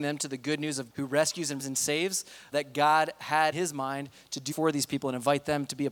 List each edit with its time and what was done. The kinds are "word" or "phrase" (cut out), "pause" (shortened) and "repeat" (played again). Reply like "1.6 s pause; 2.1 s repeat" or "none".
0.9 s word; 1.6 s word; 2.5 s word; 3.5 s word; 4.5 s word